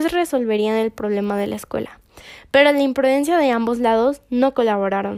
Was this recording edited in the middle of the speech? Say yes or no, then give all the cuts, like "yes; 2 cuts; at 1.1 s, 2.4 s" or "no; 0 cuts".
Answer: no; 0 cuts